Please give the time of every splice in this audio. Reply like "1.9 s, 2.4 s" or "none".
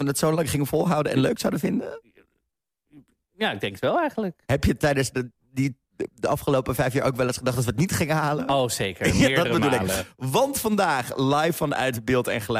none